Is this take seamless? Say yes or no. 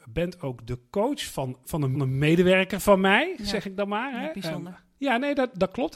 no